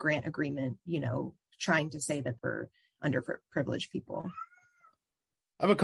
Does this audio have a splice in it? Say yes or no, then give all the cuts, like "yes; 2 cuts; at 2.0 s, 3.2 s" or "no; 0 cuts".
yes; 1 cut; at 2.4 s